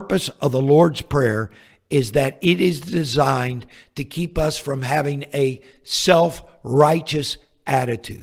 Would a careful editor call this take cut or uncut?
uncut